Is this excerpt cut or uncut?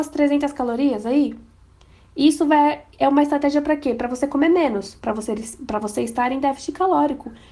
uncut